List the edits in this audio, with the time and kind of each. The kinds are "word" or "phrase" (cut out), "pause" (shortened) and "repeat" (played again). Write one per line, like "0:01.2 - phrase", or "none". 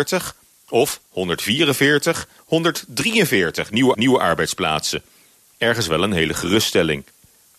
0:02.4 - word
0:03.9 - repeat